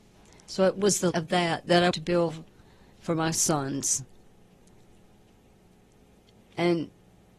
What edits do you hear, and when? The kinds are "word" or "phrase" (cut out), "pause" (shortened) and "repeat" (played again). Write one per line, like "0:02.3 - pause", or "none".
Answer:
0:01.1 - word
0:01.9 - word